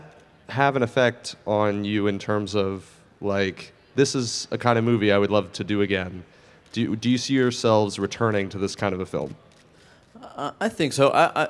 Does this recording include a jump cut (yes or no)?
no